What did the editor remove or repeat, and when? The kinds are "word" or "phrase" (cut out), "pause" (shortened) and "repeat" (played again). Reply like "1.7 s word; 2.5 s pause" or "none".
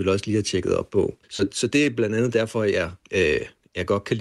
1.2 s pause; 3.0 s pause